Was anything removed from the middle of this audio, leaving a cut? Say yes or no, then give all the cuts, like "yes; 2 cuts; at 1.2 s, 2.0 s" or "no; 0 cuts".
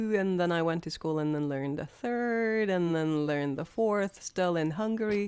no; 0 cuts